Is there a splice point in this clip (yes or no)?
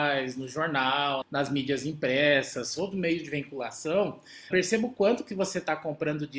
yes